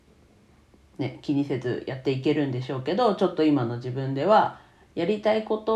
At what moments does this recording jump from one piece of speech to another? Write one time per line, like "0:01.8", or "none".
none